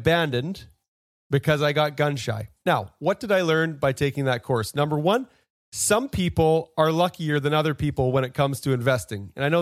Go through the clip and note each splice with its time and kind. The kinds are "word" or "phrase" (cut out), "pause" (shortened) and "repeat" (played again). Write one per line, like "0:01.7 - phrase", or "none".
none